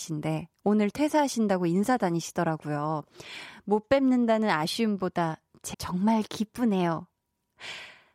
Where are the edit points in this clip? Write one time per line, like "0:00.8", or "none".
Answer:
0:05.7